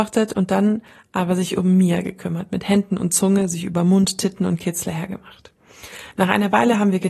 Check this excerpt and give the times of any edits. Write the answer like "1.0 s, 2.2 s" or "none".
none